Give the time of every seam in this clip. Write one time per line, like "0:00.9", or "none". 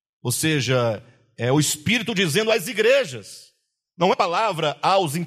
0:04.1

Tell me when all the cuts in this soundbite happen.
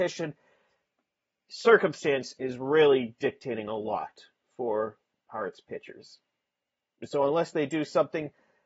none

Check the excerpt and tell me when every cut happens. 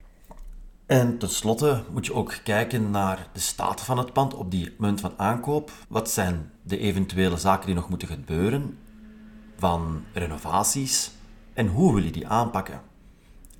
0:05.8
0:06.6

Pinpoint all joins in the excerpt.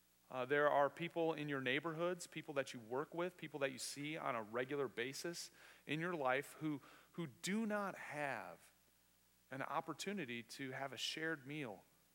none

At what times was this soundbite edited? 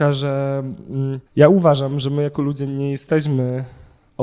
0:01.3

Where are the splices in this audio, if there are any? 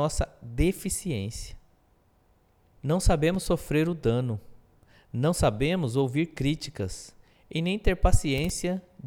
none

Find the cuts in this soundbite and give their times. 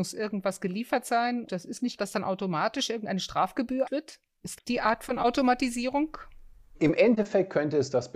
0:01.5
0:02.0
0:03.8
0:04.6

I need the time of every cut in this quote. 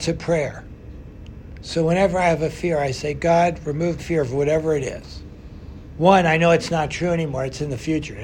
0:04.0

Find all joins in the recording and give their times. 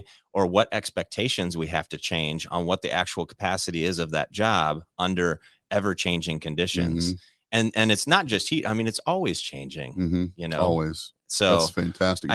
none

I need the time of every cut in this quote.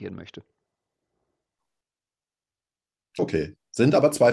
0:03.2

